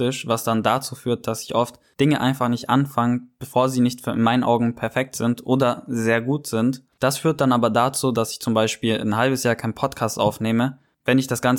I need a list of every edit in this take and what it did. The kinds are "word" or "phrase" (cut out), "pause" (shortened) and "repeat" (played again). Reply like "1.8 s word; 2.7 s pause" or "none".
none